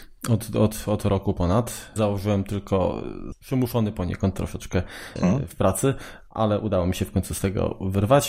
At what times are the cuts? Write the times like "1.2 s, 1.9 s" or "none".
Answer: 2.0 s, 5.2 s